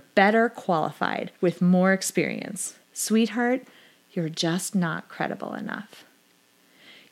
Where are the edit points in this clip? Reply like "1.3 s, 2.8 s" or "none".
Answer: 1.4 s, 2.8 s